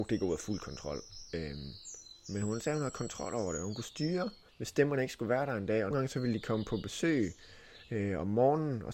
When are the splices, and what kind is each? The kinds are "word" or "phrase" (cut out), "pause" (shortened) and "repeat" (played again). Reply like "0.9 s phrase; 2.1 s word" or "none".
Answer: 4.5 s pause; 5.9 s word